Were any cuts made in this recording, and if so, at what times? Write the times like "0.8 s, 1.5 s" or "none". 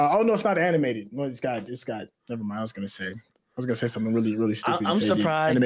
none